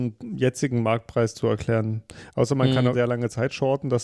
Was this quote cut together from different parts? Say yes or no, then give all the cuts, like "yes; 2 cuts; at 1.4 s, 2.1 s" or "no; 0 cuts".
yes; 2 cuts; at 1.3 s, 2.9 s